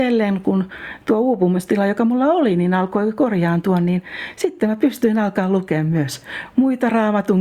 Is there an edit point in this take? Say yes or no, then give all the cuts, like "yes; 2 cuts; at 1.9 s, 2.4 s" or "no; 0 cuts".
no; 0 cuts